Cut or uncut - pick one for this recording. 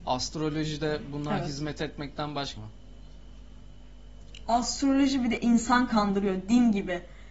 cut